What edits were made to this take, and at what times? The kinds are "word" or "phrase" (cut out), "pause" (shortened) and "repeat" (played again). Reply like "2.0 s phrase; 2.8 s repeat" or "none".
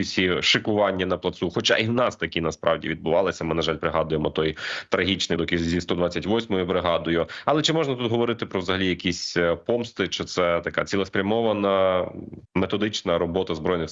5.4 s word; 12.4 s pause

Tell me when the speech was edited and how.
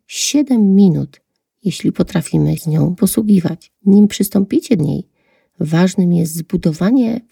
2.6 s word; 3.0 s word; 3.8 s pause; 4.8 s word

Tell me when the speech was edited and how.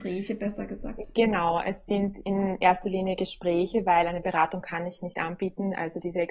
none

